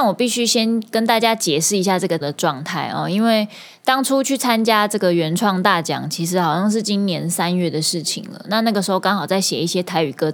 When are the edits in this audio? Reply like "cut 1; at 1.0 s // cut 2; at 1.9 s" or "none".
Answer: cut 1; at 2.2 s